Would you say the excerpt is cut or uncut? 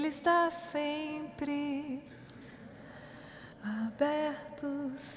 cut